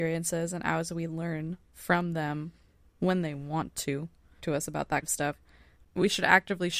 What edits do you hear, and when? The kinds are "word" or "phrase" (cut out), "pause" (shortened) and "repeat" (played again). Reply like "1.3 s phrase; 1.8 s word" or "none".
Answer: 4.4 s word; 5.0 s word